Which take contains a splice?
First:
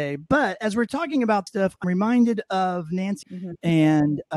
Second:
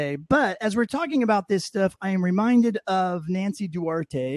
first; 3 cuts; at 1.5 s, 1.8 s, 3.2 s

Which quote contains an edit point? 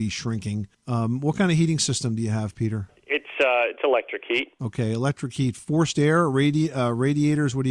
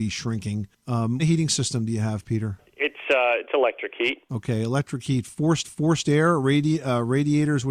second; 2 cuts; at 1.2 s, 5.6 s

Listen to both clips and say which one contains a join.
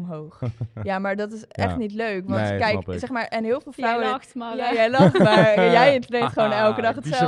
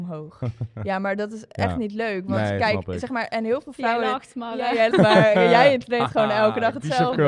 second; 1 cut; at 4.9 s

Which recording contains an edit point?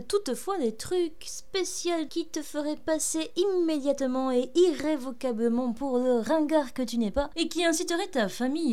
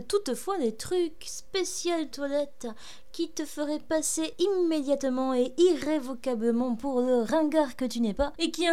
first; 1 cut; at 2.1 s

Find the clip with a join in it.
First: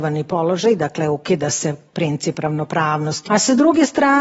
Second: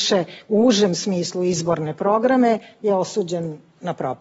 first; 1 cut; at 3.3 s

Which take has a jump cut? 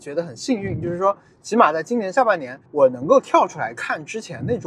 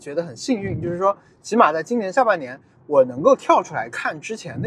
first; 1 cut; at 2.7 s

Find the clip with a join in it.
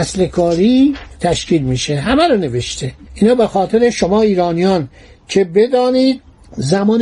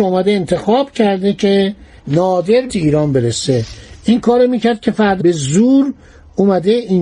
second; 2 cuts; at 2.7 s, 5.2 s

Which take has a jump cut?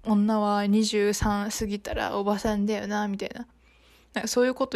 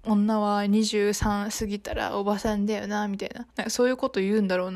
second; 1 cut; at 3.5 s

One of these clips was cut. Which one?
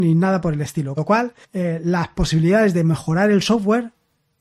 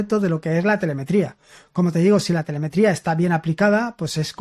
first; 2 cuts; at 1.0 s, 1.4 s

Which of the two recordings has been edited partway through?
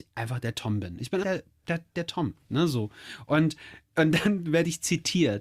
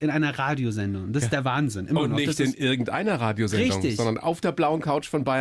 first; 1 cut; at 1.2 s

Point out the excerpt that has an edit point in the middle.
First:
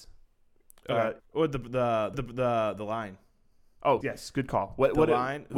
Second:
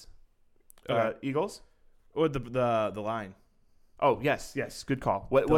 first; 3 cuts; at 1.2 s, 2.1 s, 4.0 s

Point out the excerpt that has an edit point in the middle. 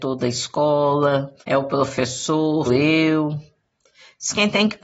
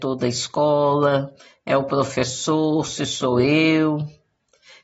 first; 2 cuts; at 1.4 s, 2.7 s

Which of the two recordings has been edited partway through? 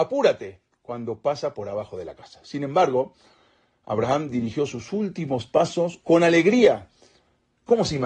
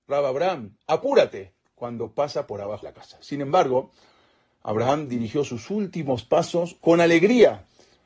second; 1 cut; at 2.8 s

